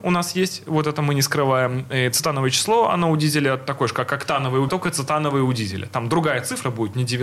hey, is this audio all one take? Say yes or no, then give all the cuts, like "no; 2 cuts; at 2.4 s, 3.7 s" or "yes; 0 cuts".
no; 1 cut; at 4.7 s